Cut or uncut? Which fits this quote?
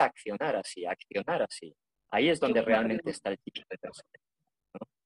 uncut